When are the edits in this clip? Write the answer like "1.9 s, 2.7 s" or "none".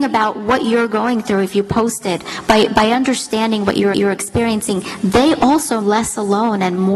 3.9 s, 5.8 s